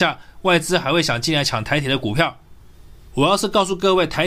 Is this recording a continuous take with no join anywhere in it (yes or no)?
yes